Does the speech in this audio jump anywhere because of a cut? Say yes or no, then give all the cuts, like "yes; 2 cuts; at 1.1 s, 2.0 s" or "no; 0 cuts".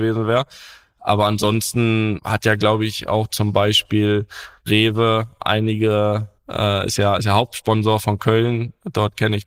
yes; 1 cut; at 6.4 s